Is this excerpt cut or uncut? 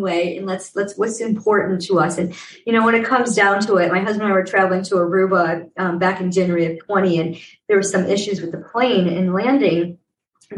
uncut